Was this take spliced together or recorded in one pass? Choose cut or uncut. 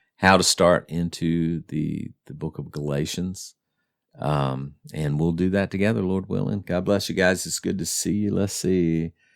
uncut